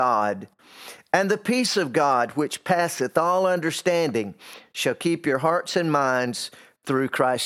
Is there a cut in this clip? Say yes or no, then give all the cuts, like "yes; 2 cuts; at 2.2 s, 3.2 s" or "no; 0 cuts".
no; 0 cuts